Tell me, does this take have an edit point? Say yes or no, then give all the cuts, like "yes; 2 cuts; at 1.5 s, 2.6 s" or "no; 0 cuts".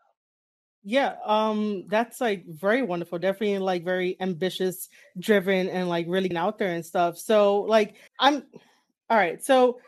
yes; 2 cuts; at 6.3 s, 8.1 s